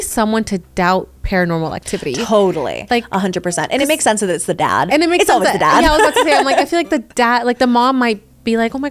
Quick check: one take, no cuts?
yes; 0 cuts

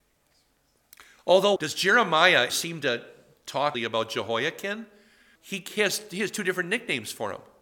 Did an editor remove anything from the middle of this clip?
yes; 4 cuts; at 1.6 s, 2.5 s, 3.7 s, 5.4 s

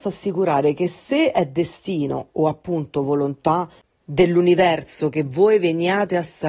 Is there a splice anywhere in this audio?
no; 0 cuts

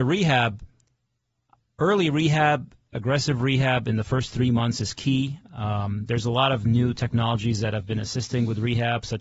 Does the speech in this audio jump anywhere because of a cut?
no; 0 cuts

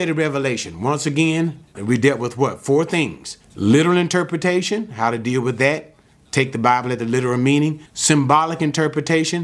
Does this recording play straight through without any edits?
no; 3 cuts; at 1.7 s, 3.4 s, 7.9 s

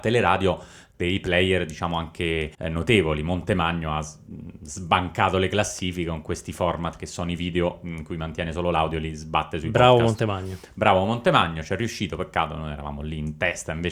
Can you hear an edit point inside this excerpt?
yes; 1 cut; at 2.5 s

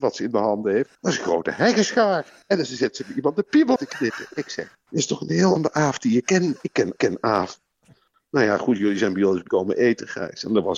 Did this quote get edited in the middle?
yes; 7 cuts; at 0.9 s, 2.4 s, 3.8 s, 4.7 s, 5.6 s, 7.0 s, 9.5 s

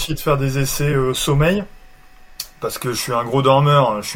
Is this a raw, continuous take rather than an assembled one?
yes; 0 cuts

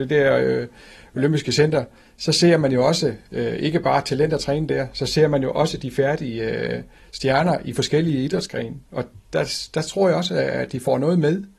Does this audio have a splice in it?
no; 0 cuts

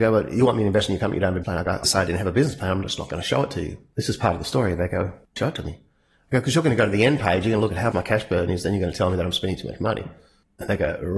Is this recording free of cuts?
no; 4 cuts; at 1.4 s, 1.8 s, 5.4 s, 7.9 s

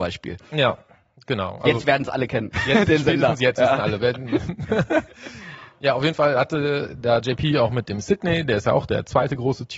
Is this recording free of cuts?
yes; 0 cuts

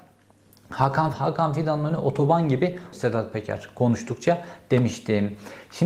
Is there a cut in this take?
yes; 2 cuts; at 1.1 s, 2.9 s

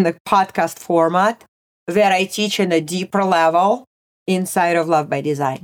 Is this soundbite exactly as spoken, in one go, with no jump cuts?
yes; 0 cuts

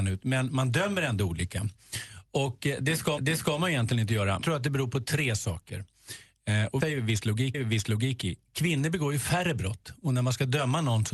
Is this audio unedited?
no; 4 cuts; at 3.2 s, 4.4 s, 6.8 s, 7.5 s

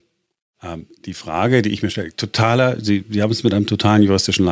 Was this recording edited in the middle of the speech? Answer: no; 0 cuts

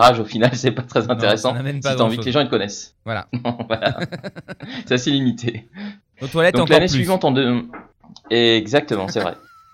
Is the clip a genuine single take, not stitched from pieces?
yes; 0 cuts

